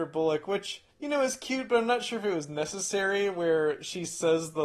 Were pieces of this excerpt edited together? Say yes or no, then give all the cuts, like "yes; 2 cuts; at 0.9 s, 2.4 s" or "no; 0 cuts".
yes; 1 cut; at 0.9 s